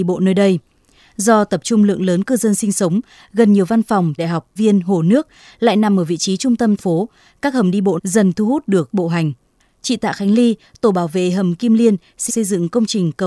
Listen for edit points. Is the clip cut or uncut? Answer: cut